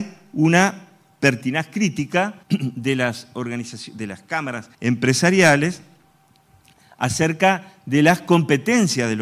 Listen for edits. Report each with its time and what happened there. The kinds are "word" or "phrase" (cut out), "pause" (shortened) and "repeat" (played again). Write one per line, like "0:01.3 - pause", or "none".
0:02.4 - pause
0:04.7 - pause